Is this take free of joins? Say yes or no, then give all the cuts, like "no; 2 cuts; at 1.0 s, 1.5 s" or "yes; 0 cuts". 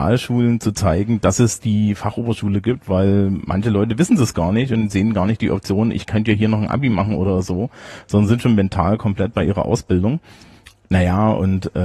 yes; 0 cuts